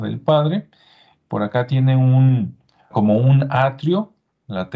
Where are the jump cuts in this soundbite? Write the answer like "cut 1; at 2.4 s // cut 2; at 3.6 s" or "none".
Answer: cut 1; at 2.9 s